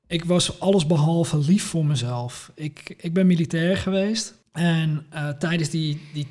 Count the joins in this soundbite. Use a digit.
1